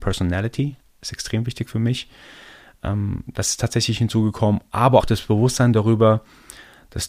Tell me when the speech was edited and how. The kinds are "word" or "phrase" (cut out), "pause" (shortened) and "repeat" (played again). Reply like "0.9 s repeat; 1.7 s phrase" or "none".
5.0 s word